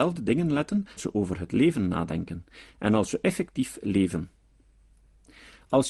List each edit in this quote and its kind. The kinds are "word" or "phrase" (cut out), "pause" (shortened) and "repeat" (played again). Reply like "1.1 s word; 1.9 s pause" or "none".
1.0 s word